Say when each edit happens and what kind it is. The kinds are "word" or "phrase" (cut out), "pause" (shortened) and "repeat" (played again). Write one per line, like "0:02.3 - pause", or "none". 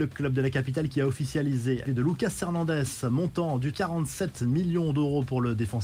0:01.9 - word
0:03.7 - word